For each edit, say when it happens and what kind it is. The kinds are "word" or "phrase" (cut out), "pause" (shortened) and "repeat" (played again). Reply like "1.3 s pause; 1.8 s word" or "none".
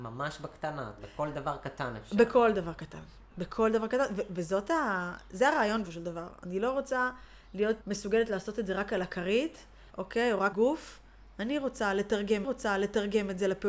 1.0 s word; 5.8 s word; 7.8 s word; 9.9 s pause; 10.5 s word; 12.4 s repeat